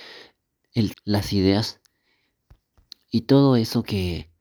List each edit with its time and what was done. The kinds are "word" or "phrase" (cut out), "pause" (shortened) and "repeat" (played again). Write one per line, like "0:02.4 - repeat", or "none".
0:00.9 - word